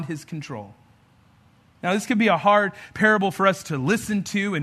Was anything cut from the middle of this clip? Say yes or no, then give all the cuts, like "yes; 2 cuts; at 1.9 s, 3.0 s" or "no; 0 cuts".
no; 0 cuts